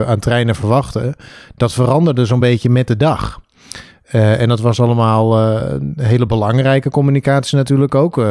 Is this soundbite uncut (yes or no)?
yes